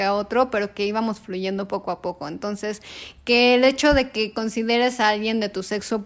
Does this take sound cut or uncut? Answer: uncut